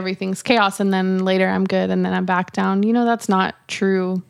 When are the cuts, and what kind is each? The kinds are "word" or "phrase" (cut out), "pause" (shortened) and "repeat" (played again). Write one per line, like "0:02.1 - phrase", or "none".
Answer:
none

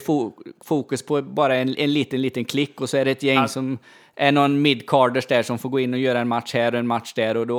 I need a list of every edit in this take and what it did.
none

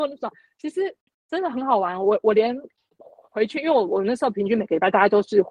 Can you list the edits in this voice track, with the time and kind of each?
none

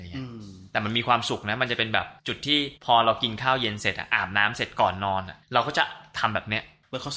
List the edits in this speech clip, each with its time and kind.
0:02.2 - pause
0:02.8 - pause
0:05.4 - pause

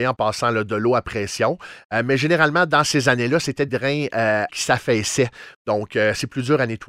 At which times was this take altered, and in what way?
0:03.7 - word
0:04.5 - word

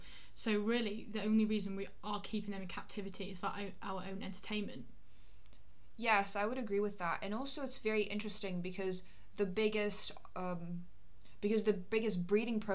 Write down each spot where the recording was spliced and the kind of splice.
none

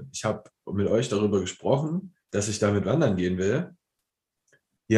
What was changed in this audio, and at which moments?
0:02.2 - pause

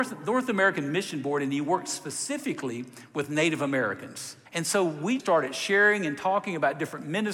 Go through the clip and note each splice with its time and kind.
0:04.5 - pause
0:05.2 - word

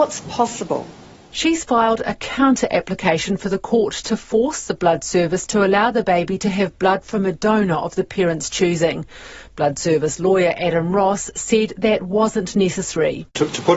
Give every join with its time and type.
none

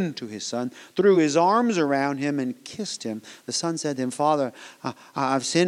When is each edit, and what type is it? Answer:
none

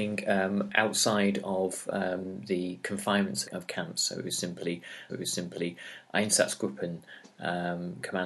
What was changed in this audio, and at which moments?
0:03.4 - word
0:05.1 - repeat

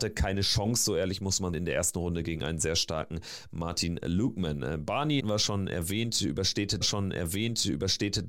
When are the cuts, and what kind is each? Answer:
0:01.5 - word
0:05.2 - word
0:06.8 - repeat

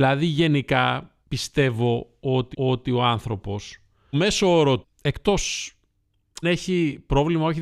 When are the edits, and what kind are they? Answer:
0:01.2 - pause
0:02.5 - repeat
0:04.1 - word
0:04.8 - word
0:06.4 - word

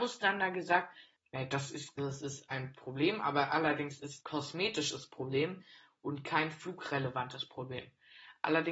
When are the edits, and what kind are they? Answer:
0:02.0 - word
0:02.5 - word
0:04.2 - word

